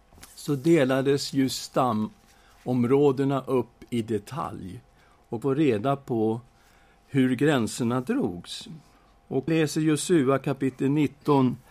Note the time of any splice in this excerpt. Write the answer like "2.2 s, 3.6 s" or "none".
5.4 s, 9.5 s